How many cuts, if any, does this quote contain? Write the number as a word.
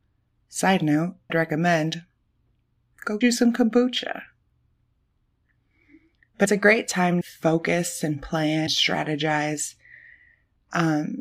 five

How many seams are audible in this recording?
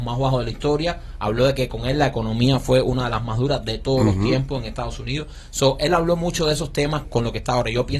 one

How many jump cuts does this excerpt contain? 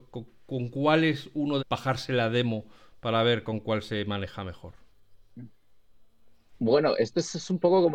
one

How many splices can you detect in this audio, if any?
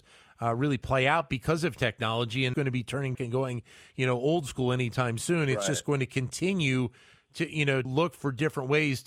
three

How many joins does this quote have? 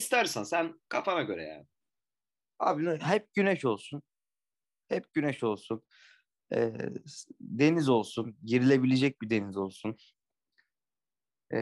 zero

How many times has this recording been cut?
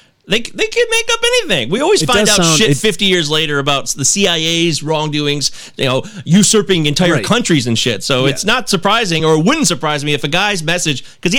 zero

